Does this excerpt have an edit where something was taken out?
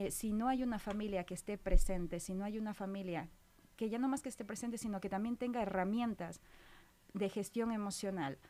no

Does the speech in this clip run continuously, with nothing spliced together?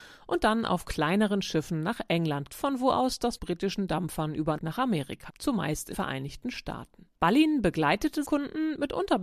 no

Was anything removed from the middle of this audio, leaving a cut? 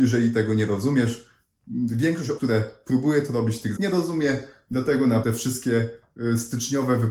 yes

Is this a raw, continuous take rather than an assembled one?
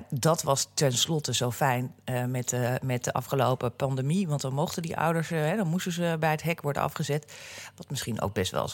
yes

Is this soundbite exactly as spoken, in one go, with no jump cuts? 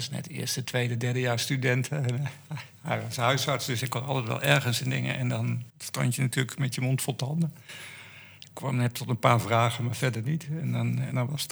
no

